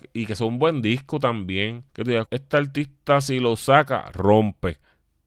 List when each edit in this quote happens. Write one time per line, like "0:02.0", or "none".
0:01.9
0:02.2